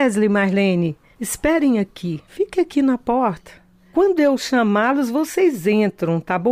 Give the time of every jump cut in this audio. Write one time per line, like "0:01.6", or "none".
none